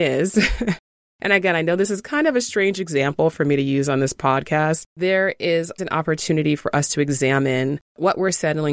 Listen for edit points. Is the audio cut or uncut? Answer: cut